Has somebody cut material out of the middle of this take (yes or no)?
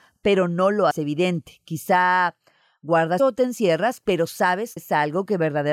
yes